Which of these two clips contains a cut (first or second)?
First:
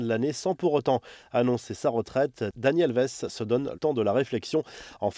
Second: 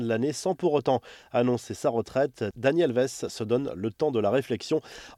first